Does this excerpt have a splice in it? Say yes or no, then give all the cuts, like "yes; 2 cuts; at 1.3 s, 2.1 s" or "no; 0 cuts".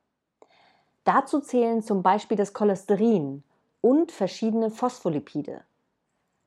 no; 0 cuts